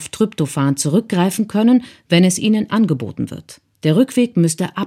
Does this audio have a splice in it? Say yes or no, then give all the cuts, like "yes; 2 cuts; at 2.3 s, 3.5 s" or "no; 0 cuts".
yes; 2 cuts; at 2.7 s, 3.7 s